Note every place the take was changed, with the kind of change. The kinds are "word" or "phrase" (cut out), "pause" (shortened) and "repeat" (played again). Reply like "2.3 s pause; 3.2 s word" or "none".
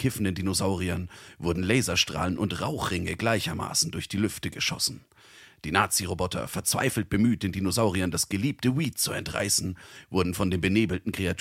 none